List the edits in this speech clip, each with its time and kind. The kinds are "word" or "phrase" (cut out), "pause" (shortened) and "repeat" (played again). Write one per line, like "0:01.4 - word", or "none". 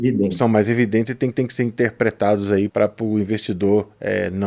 0:01.3 - repeat
0:02.7 - word